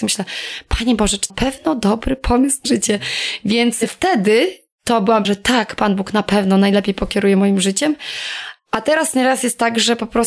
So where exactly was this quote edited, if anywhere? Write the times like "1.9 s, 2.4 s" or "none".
1.3 s, 2.6 s, 5.2 s